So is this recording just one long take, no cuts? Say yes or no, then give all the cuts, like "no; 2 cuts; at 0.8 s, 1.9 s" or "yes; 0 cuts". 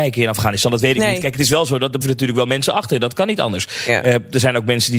no; 1 cut; at 2.0 s